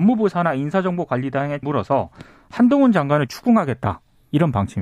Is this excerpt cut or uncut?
cut